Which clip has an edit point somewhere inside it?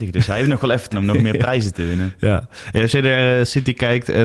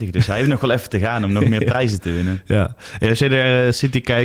first; 1 cut; at 0.9 s

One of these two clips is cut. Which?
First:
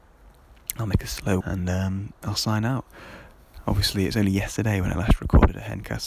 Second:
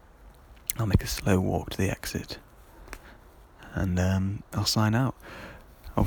first; 1 cut; at 1.4 s

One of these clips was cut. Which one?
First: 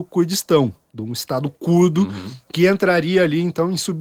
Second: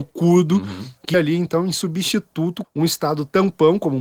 second; 2 cuts; at 1.1 s, 2.6 s

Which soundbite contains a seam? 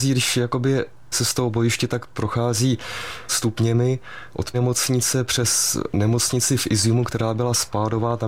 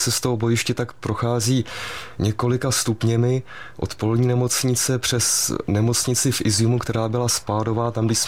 first; 3 cuts; at 1.1 s, 3.3 s, 4.5 s

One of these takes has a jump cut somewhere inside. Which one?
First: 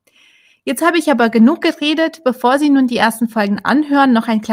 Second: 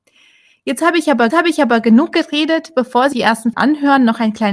second; 3 cuts; at 1.3 s, 3.1 s, 3.5 s

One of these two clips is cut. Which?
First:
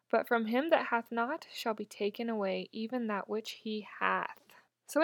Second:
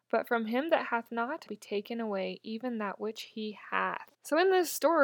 second; 2 cuts; at 1.5 s, 4.1 s

